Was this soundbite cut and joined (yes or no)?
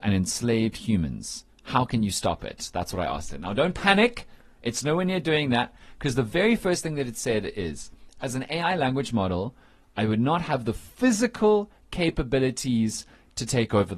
no